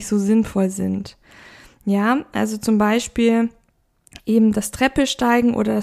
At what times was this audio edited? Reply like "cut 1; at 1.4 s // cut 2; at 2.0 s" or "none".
none

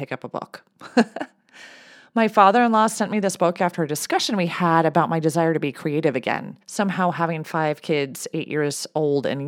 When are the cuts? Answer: cut 1; at 6.6 s

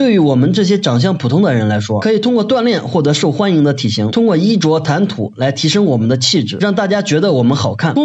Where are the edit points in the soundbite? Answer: none

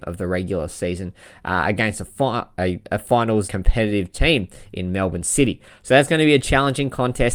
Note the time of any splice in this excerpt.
cut 1; at 3.5 s

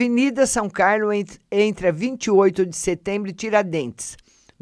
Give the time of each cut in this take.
none

